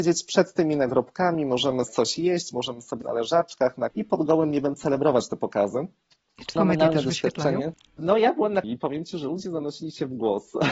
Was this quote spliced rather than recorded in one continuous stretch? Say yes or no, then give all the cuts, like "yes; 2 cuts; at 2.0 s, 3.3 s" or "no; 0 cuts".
yes; 5 cuts; at 1.9 s, 3.0 s, 3.9 s, 6.6 s, 8.6 s